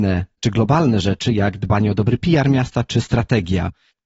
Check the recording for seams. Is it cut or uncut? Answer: uncut